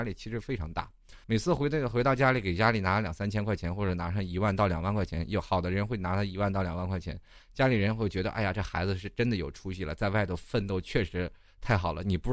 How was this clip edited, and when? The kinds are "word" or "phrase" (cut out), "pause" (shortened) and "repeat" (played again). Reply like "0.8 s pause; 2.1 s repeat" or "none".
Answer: 1.2 s pause

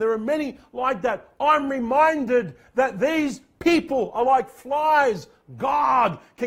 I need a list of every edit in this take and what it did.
none

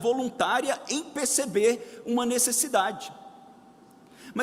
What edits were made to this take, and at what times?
none

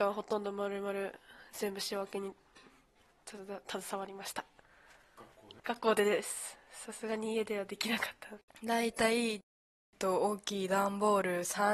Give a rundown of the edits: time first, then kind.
5.6 s pause; 8.5 s pause

